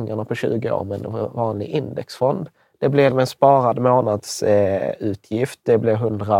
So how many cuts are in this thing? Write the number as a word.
one